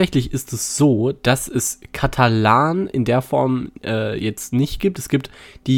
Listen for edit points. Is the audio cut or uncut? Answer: uncut